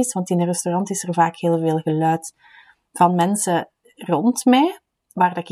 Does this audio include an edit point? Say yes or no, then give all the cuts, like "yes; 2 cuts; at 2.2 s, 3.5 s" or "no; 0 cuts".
no; 0 cuts